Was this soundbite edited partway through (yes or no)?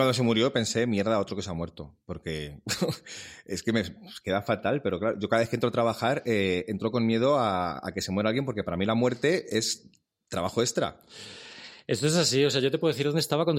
no